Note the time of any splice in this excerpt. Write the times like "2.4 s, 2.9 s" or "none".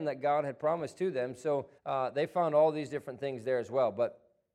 1.8 s